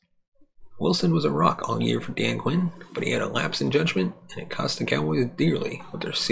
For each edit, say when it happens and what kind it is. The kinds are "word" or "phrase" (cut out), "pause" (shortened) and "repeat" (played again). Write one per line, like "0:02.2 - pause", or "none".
none